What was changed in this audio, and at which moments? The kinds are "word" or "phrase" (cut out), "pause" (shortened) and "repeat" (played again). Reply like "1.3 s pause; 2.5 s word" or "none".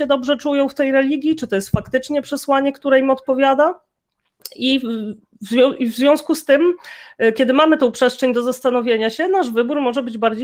none

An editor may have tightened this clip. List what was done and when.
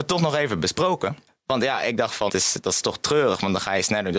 1.3 s pause; 2.3 s word

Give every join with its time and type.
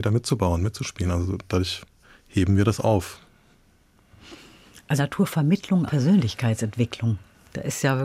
2.0 s pause; 5.0 s word; 5.9 s phrase

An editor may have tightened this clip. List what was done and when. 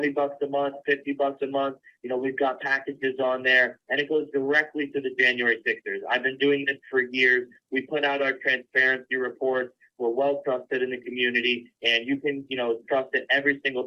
none

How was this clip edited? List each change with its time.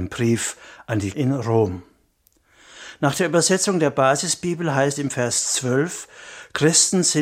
1.1 s word; 5.0 s word

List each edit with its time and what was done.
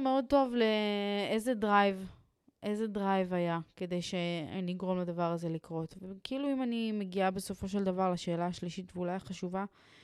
none

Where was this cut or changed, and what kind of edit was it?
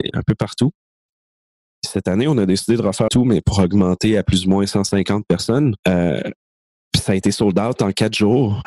3.1 s word; 5.8 s pause

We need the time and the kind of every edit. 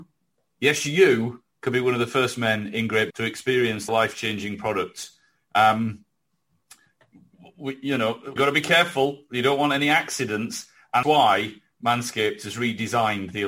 3.1 s word; 3.9 s word; 8.4 s word; 11.0 s word

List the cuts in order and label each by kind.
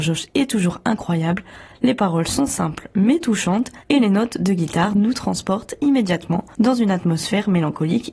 3.8 s pause

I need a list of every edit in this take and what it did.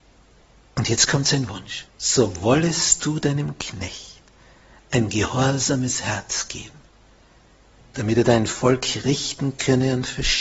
1.9 s pause

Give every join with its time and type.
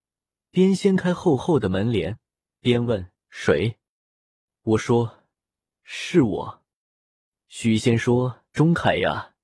none

